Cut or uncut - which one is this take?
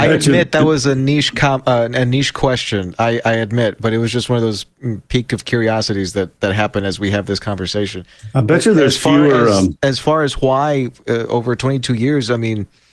uncut